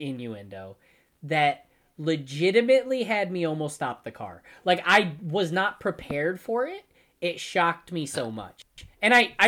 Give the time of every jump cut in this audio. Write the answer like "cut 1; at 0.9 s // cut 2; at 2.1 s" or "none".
none